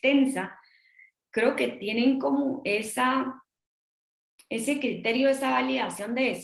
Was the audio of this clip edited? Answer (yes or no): no